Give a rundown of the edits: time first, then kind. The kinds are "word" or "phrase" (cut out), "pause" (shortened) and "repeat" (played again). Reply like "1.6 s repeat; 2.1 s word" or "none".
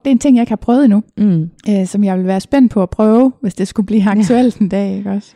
1.6 s pause

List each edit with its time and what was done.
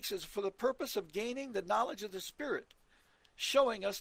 none

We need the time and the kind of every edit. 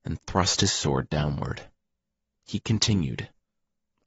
none

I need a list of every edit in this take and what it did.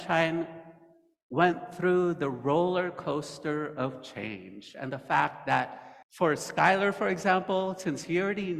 6.0 s pause

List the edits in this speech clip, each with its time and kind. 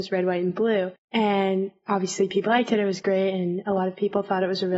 1.0 s pause; 2.5 s word

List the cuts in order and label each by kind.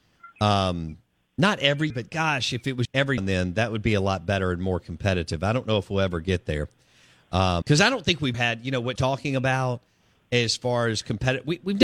1.9 s word; 2.8 s word; 3.2 s word; 7.6 s word; 8.3 s word; 9.0 s word

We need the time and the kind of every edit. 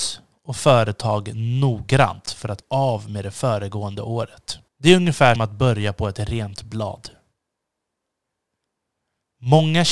2.6 s word; 4.7 s pause; 5.4 s word

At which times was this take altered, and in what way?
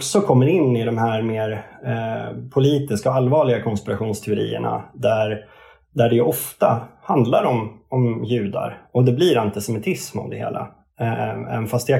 none

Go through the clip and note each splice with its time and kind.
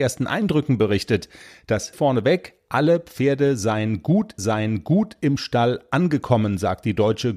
1.9 s word; 4.4 s repeat

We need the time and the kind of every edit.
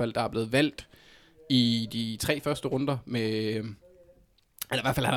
none

